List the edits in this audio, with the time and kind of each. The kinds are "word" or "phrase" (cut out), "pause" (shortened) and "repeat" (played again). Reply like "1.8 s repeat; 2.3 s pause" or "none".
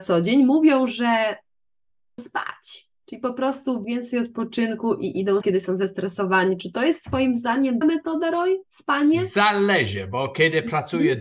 2.2 s word; 3.8 s phrase; 5.4 s word; 7.8 s word